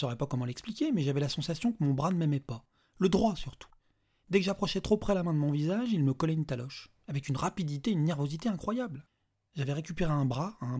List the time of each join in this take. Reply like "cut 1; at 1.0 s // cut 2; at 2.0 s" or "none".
none